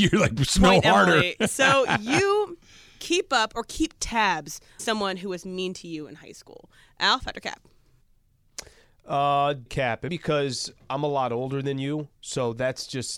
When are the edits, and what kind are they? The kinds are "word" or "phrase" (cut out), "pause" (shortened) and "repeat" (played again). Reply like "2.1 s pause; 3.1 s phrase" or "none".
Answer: 2.6 s pause; 4.8 s word; 9.7 s word; 10.1 s word